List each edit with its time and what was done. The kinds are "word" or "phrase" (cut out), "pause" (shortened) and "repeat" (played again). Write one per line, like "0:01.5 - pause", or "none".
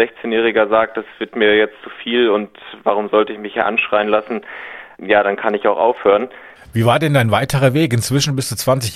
none

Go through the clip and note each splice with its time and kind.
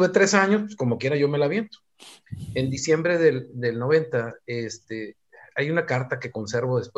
none

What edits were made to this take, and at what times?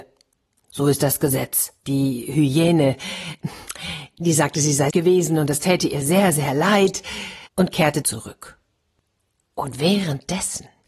0:01.8 - pause
0:04.9 - phrase
0:07.5 - pause
0:08.0 - phrase

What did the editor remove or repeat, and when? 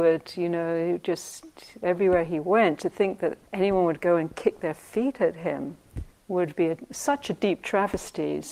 0:03.5 - pause
0:06.1 - pause

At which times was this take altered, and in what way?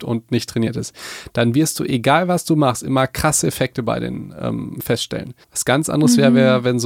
0:05.4 - pause

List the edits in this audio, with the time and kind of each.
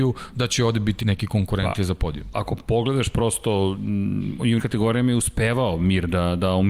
0:01.0 - word
0:02.3 - word
0:04.6 - word

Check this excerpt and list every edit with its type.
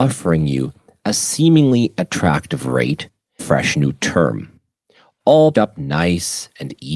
0:03.4 - word
0:05.5 - word

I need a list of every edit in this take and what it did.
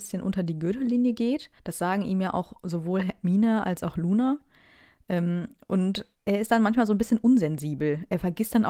0:01.6 - pause
0:06.1 - pause

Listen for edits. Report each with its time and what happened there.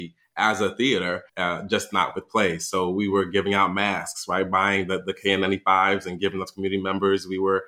0:01.3 - pause

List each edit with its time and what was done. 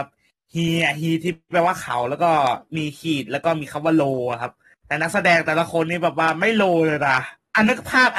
none

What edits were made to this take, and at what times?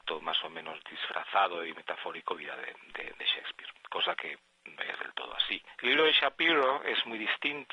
0:02.4 - word
0:04.8 - phrase

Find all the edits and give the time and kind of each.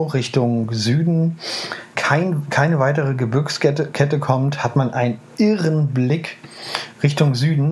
0:02.0 - word

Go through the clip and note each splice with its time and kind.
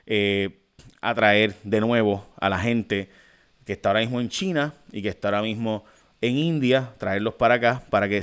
none

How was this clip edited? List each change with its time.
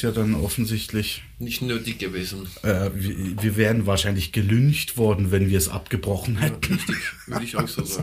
none

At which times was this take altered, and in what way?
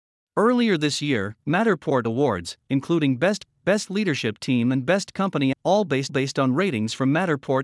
0:02.0 - phrase
0:03.4 - word
0:05.5 - word
0:06.1 - repeat

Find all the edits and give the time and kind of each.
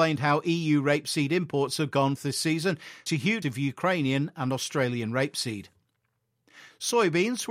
0:02.2 - phrase
0:03.1 - word
0:03.4 - word

